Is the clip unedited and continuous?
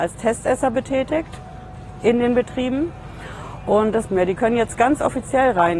no; 1 cut; at 4.1 s

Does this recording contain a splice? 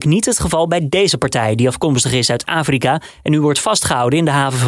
no; 0 cuts

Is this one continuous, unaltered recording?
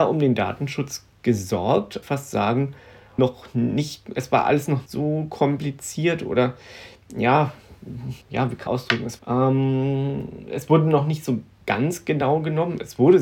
no; 7 cuts; at 2.0 s, 3.2 s, 4.1 s, 4.9 s, 8.2 s, 8.7 s, 9.2 s

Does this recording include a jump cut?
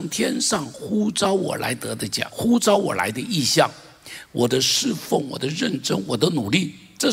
yes; 1 cut; at 2.3 s

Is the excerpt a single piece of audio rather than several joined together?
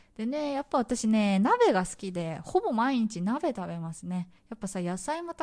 no; 1 cut; at 4.4 s

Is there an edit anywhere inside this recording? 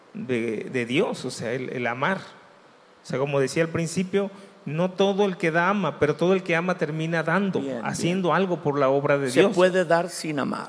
no; 0 cuts

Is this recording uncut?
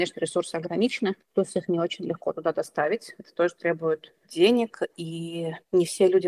yes; 0 cuts

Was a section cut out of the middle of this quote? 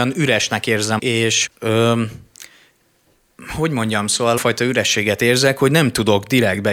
yes; 3 cuts; at 1.0 s, 1.5 s, 4.4 s

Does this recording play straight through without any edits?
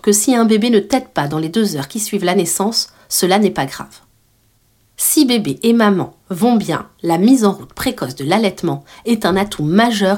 yes; 0 cuts

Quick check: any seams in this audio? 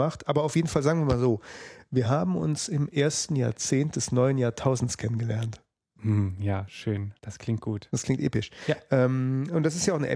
yes; 1 cut; at 7.2 s

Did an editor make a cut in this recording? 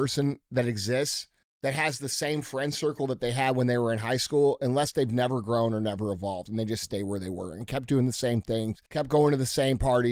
yes; 2 cuts; at 1.4 s, 8.9 s

